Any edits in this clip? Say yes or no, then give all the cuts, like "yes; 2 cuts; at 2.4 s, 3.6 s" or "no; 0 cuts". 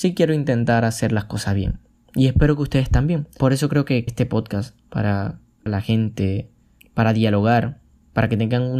yes; 3 cuts; at 1.9 s, 4.1 s, 5.7 s